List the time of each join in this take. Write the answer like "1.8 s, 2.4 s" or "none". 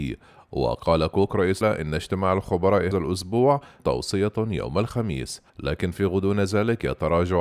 1.6 s, 2.9 s, 3.8 s, 5.5 s

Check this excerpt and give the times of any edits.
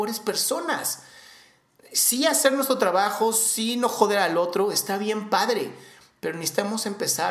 none

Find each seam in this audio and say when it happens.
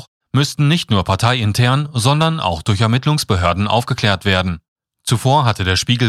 none

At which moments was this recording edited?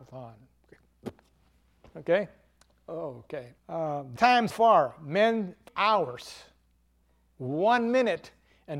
1.5 s, 3.6 s, 4.2 s, 4.5 s, 5.7 s

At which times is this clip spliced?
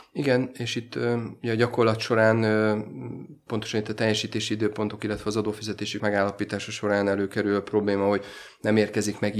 6.0 s

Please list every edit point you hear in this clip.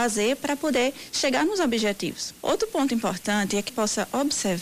3.7 s

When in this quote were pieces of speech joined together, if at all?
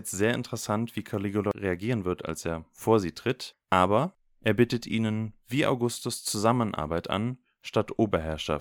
none

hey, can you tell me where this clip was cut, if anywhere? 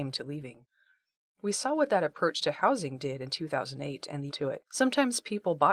4.3 s, 4.7 s

